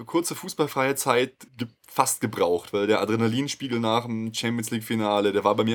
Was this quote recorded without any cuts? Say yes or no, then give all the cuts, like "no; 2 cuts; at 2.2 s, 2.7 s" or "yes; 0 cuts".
no; 1 cut; at 1.5 s